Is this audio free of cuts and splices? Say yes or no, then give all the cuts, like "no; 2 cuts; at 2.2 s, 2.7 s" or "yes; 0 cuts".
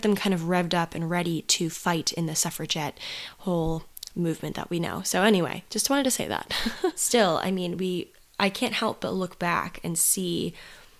yes; 0 cuts